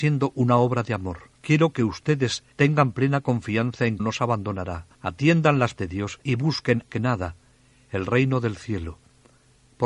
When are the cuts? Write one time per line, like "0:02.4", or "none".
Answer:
0:01.3
0:02.5
0:04.0
0:04.9
0:05.8
0:06.2
0:06.9

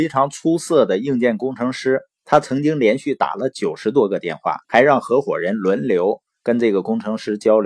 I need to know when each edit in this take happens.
0:04.6

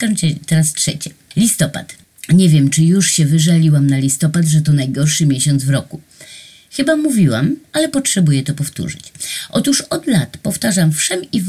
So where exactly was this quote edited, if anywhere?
none

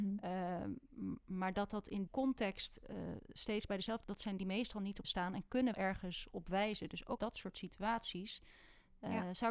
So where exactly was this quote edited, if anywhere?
0:02.1
0:04.0
0:04.4
0:05.0
0:05.7
0:07.2

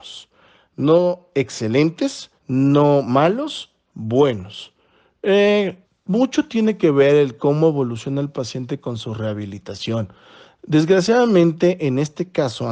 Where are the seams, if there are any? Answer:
0:02.4
0:05.8

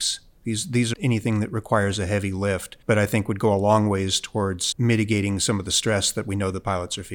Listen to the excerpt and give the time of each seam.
0:00.9
0:02.8
0:04.7

